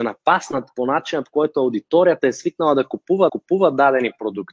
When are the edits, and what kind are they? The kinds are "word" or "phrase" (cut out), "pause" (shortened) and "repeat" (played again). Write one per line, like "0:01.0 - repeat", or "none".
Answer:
0:03.3 - repeat